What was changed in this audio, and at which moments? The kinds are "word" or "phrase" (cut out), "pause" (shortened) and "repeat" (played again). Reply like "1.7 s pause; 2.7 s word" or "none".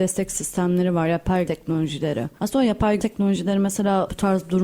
1.5 s word; 3.0 s word